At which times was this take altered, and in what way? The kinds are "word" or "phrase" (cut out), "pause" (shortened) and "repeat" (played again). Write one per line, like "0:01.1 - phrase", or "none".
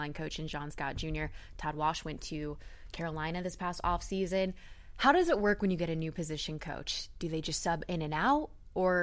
none